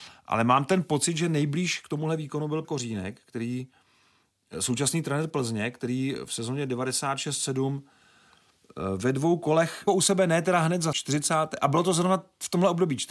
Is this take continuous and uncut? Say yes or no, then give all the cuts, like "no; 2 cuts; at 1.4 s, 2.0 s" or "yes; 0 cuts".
no; 3 cuts; at 2.6 s, 9.9 s, 10.9 s